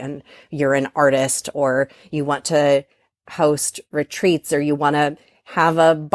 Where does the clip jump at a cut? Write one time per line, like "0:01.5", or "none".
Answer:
none